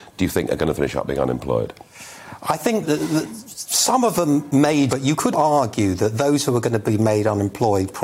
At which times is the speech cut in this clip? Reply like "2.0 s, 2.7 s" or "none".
2.8 s, 4.9 s, 5.3 s